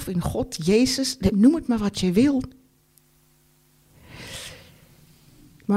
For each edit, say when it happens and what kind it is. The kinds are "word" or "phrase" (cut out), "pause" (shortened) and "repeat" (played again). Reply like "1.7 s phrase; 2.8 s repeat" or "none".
1.3 s word

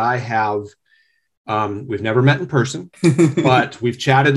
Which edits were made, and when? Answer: 2.9 s pause

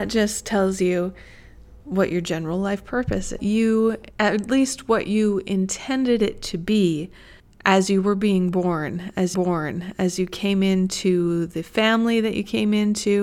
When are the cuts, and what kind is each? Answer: 3.4 s phrase; 4.1 s pause; 7.4 s pause; 9.3 s repeat

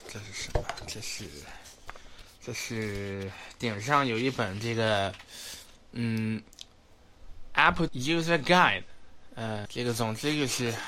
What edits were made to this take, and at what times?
7.9 s word; 9.6 s word

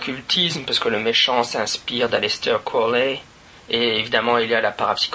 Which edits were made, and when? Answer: none

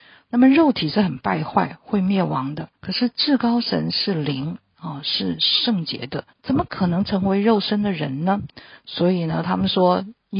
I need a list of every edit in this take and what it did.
2.7 s pause; 6.3 s pause

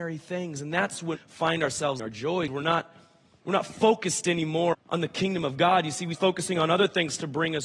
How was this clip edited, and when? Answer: 1.2 s word; 2.0 s word; 2.5 s word; 4.7 s word; 6.1 s word

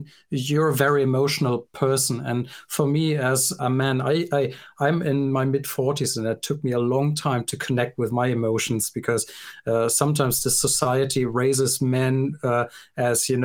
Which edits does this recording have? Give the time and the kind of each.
3.6 s word

